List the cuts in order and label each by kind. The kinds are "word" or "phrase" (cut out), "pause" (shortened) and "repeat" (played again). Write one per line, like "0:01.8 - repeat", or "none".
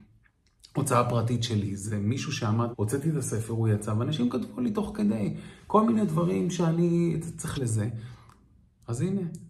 0:02.7 - word
0:07.5 - phrase